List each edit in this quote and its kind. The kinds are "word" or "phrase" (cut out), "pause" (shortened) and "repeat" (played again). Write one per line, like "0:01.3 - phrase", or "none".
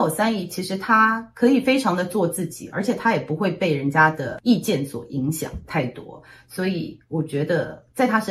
none